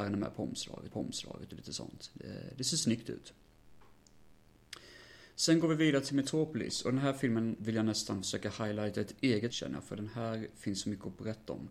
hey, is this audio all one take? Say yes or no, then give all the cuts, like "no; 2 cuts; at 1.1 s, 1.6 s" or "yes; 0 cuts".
no; 2 cuts; at 0.9 s, 9.5 s